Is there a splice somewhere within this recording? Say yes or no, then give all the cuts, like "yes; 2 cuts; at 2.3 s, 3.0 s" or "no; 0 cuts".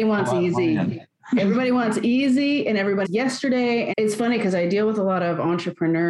yes; 2 cuts; at 3.0 s, 3.9 s